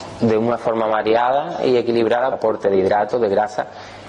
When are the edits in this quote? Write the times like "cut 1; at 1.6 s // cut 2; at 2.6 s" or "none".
cut 1; at 2.3 s